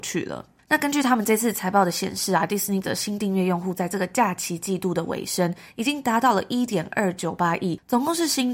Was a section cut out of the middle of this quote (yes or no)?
yes